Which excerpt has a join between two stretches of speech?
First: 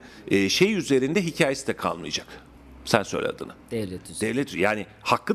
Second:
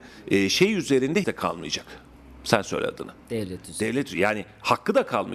second; 1 cut; at 1.2 s

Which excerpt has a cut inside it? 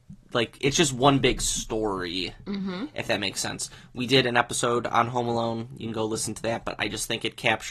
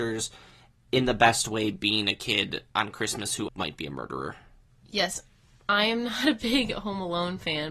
second; 2 cuts; at 2.7 s, 3.5 s

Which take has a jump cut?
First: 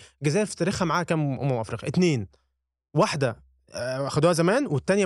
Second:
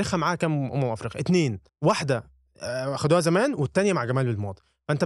second; 1 cut; at 1.7 s

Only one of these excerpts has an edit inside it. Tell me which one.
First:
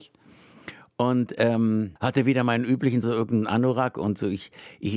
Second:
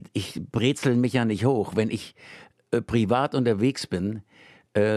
first; 1 cut; at 3.0 s

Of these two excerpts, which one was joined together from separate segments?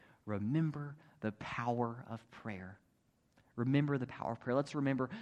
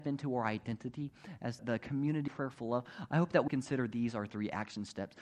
second; 3 cuts; at 1.6 s, 2.3 s, 3.5 s

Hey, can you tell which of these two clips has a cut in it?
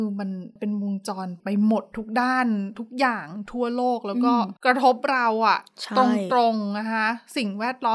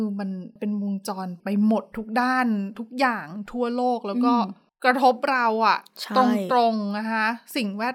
first; 1 cut; at 4.6 s

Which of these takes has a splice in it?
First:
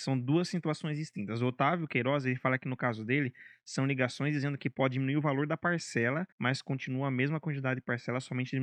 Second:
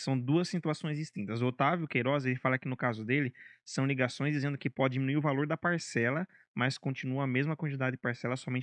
first; 1 cut; at 6.3 s

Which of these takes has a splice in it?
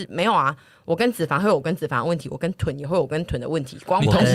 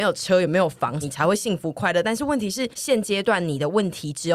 second; 2 cuts; at 1.0 s, 2.7 s

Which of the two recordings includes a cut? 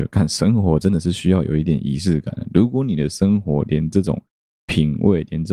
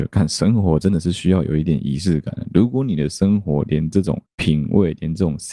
second; 1 cut; at 4.3 s

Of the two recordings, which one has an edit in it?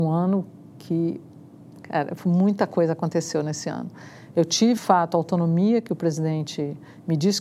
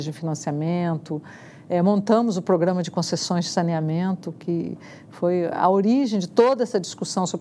first; 1 cut; at 4.8 s

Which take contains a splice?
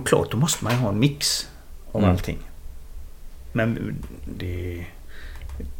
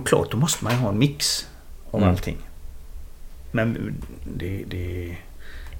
first; 1 cut; at 4.3 s

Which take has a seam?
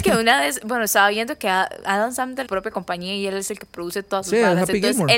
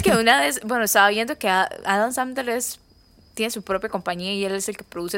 first; 1 cut; at 2.5 s

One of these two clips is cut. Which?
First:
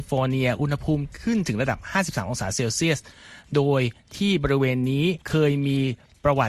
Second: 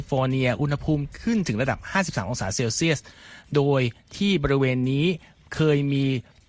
first; 1 cut; at 5.2 s

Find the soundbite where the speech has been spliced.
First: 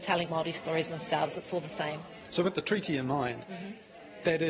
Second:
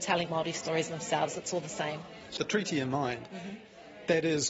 second; 1 cut; at 2.4 s

